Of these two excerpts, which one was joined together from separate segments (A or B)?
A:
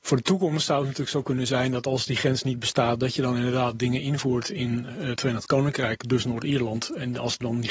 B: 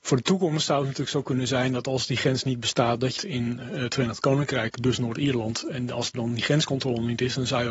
B